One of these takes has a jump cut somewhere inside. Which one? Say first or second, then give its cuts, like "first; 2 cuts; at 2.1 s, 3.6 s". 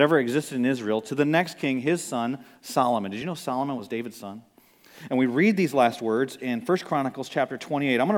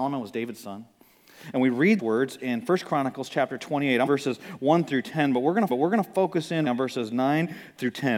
second; 4 cuts; at 2.0 s, 4.1 s, 5.7 s, 6.7 s